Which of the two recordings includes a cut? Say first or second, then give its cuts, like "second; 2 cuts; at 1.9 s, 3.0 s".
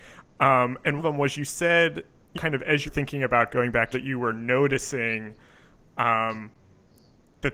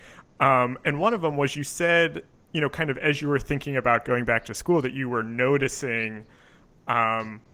first; 4 cuts; at 1.0 s, 2.3 s, 2.9 s, 3.9 s